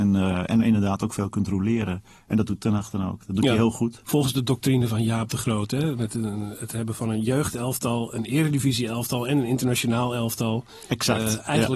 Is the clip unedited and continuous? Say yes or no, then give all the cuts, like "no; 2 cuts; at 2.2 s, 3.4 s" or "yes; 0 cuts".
yes; 0 cuts